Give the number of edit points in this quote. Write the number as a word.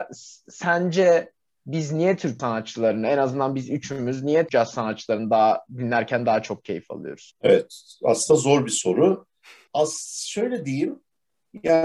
two